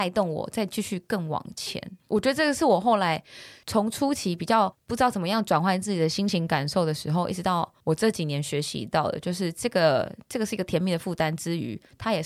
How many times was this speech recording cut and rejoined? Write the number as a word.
one